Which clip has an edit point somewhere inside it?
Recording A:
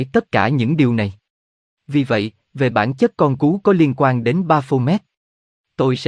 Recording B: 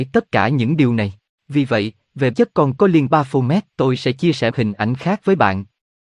B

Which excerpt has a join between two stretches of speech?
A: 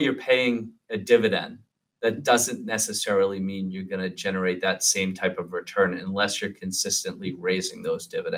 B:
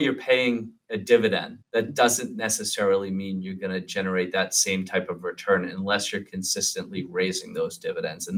B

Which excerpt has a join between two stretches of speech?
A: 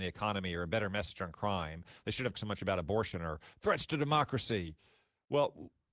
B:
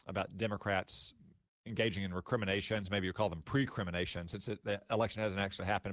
A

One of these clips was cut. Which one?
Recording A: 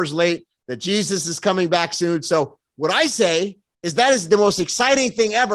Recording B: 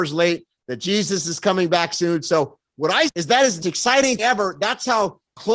B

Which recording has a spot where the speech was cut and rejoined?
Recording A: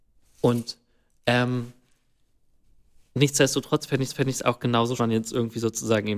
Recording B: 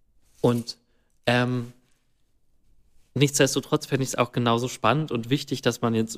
A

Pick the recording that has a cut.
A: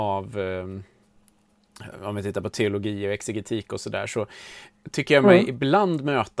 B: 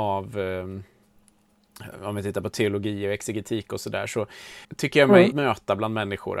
B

